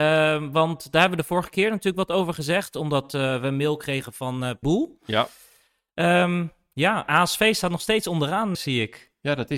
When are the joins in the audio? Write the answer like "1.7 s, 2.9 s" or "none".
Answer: 4.6 s, 8.5 s